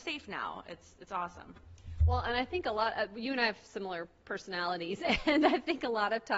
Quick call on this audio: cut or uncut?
uncut